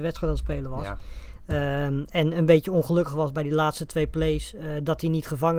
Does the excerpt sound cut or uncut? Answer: uncut